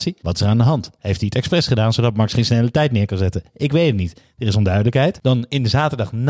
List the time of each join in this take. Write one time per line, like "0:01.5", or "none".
none

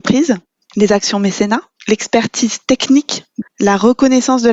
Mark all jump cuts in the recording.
0:03.4

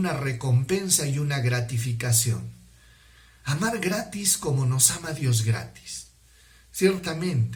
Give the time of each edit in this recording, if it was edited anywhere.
none

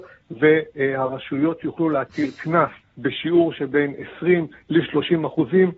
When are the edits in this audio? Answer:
0:02.8

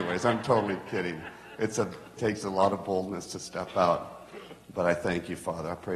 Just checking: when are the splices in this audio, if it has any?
0:02.2

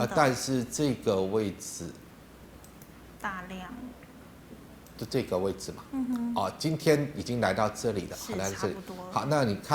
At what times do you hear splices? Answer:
none

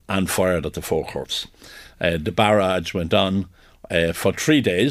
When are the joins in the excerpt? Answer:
none

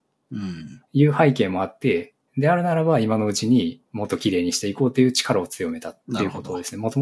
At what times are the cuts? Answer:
0:03.9
0:06.0

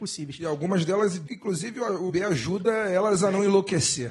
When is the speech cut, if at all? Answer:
0:01.3
0:02.1

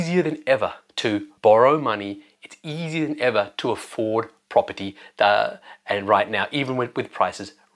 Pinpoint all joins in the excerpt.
0:01.4

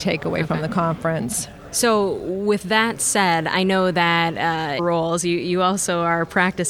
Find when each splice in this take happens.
0:04.8

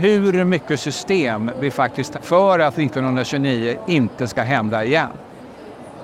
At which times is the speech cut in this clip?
0:02.1

